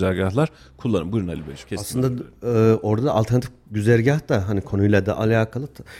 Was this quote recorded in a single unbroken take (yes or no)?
no